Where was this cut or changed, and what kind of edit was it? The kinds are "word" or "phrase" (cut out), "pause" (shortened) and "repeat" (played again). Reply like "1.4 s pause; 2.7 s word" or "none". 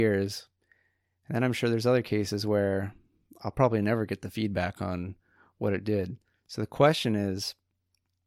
none